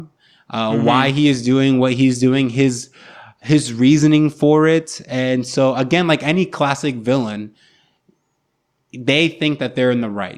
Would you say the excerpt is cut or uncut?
uncut